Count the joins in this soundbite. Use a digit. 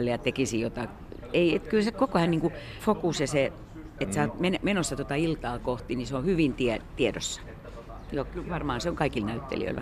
1